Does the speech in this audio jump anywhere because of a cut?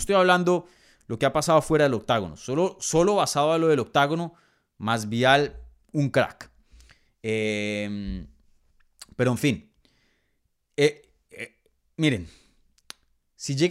no; 0 cuts

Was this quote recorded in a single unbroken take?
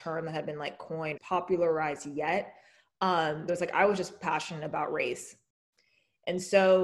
no; 2 cuts; at 1.2 s, 3.5 s

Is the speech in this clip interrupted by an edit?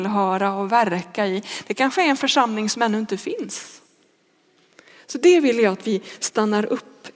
no; 0 cuts

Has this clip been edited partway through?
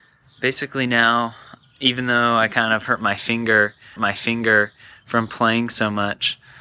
yes; 1 cut; at 4.0 s

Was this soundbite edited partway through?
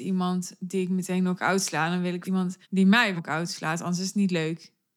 yes; 3 cuts; at 2.2 s, 2.6 s, 3.2 s

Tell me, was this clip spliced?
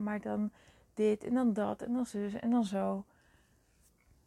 no; 0 cuts

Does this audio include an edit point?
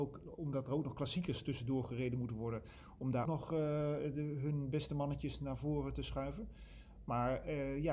yes; 1 cut; at 3.2 s

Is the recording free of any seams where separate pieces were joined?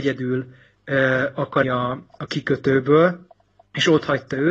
no; 1 cut; at 1.6 s

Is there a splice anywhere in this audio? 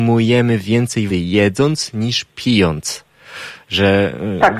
yes; 1 cut; at 1.1 s

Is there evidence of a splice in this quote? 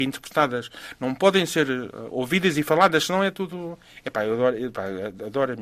no; 0 cuts

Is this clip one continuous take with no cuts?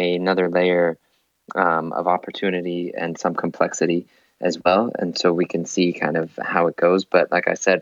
yes; 0 cuts

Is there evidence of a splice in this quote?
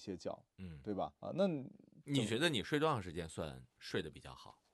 yes; 2 cuts; at 1.1 s, 3.7 s

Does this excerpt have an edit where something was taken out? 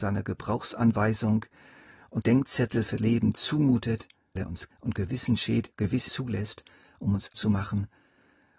yes; 6 cuts; at 2.2 s, 3.0 s, 4.4 s, 4.7 s, 6.1 s, 7.3 s

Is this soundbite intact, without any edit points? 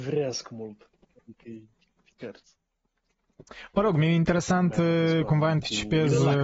yes; 0 cuts

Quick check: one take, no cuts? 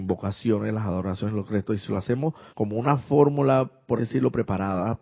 no; 2 cuts; at 2.5 s, 4.0 s

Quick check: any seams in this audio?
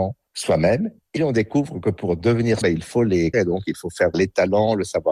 yes; 4 cuts; at 1.2 s, 2.6 s, 3.3 s, 4.1 s

